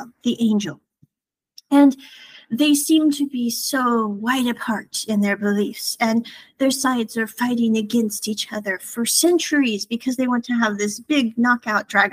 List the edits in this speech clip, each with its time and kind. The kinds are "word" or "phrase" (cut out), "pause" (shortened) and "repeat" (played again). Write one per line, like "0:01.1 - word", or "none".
none